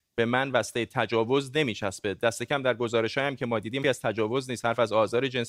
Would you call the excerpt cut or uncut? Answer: cut